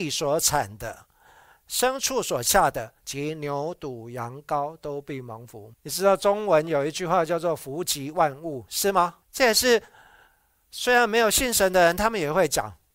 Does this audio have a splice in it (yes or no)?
yes